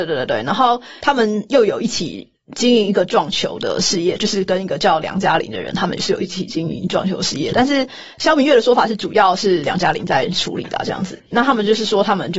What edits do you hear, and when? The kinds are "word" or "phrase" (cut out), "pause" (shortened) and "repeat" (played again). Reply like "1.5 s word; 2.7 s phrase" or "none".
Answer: 8.1 s pause